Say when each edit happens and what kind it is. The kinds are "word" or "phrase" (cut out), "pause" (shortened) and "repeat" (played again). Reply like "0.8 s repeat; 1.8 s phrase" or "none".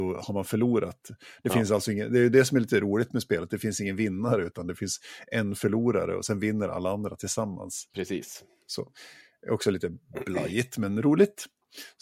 7.9 s pause